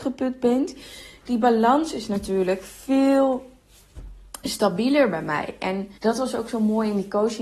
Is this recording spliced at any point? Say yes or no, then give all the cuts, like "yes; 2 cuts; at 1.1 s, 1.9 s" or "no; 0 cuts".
yes; 1 cut; at 6.0 s